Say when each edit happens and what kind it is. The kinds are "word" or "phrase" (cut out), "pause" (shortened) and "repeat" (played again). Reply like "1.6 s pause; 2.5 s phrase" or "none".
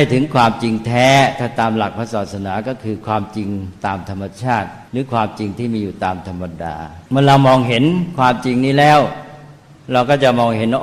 4.9 s pause; 7.1 s pause